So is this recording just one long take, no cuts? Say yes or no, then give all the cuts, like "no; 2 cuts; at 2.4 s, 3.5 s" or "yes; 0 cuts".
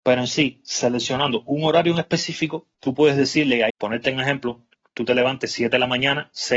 no; 2 cuts; at 2.7 s, 3.7 s